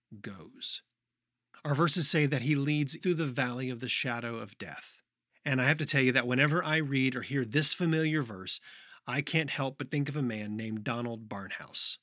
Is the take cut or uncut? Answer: cut